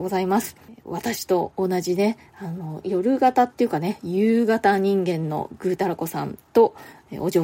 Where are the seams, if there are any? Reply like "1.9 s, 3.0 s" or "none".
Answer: 2.8 s